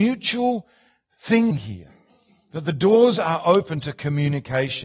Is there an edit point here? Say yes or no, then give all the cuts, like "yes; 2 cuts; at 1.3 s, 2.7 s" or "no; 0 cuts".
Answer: yes; 1 cut; at 1.5 s